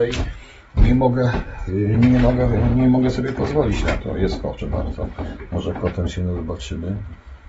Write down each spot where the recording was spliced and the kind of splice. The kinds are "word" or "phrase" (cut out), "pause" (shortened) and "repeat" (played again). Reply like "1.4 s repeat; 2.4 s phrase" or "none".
1.9 s word; 4.6 s word